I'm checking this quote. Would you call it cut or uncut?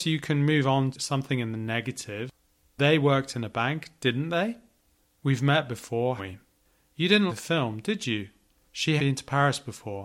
cut